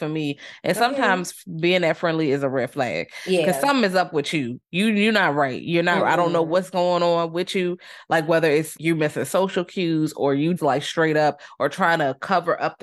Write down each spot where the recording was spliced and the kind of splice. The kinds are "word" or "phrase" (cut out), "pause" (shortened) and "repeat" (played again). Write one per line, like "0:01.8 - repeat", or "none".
0:08.8 - word
0:10.6 - word